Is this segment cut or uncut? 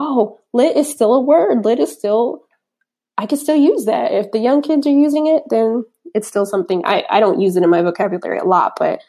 uncut